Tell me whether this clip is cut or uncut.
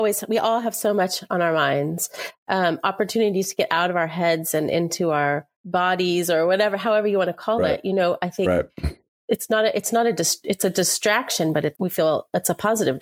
cut